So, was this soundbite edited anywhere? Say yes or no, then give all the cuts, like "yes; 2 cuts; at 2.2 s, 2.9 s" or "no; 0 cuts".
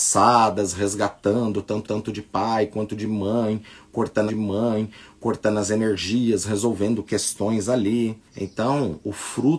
yes; 3 cuts; at 1.8 s, 4.3 s, 8.3 s